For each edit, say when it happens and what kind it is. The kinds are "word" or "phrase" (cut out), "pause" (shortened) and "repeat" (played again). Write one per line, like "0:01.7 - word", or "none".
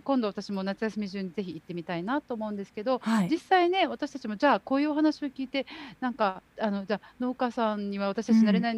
0:06.5 - pause